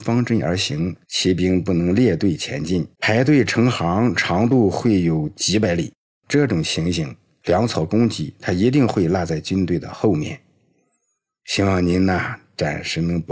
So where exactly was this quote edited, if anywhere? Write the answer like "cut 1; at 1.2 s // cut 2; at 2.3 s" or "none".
cut 1; at 1.0 s // cut 2; at 2.9 s // cut 3; at 6.3 s